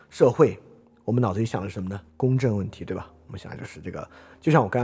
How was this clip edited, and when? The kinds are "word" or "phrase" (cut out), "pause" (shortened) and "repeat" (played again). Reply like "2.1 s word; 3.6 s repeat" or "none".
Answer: 2.1 s pause